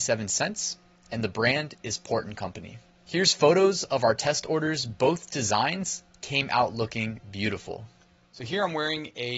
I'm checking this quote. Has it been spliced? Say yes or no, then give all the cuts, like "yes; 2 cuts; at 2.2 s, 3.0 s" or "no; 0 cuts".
no; 0 cuts